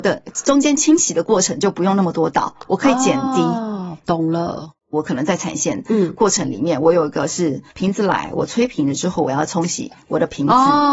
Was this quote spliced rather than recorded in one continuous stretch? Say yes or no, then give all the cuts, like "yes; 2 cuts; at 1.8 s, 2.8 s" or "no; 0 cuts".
yes; 2 cuts; at 4.8 s, 7.7 s